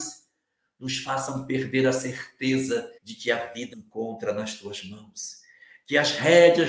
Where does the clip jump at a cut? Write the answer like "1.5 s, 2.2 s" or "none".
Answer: 3.0 s, 3.7 s